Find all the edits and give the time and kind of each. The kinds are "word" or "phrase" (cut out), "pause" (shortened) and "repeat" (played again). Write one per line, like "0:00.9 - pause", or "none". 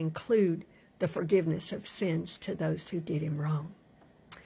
none